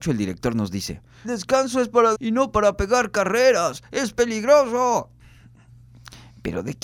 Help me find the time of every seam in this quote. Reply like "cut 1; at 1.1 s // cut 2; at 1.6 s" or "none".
cut 1; at 1.2 s // cut 2; at 2.1 s